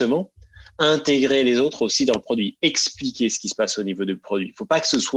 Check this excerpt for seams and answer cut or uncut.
uncut